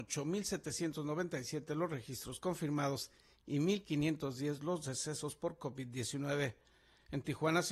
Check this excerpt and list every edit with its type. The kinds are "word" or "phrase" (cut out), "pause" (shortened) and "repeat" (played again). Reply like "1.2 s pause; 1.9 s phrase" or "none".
none

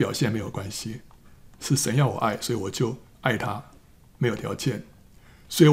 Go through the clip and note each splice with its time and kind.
none

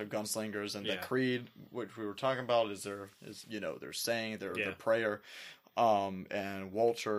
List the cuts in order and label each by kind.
3.4 s word

